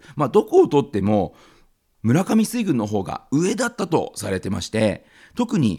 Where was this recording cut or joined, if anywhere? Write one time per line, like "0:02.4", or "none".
none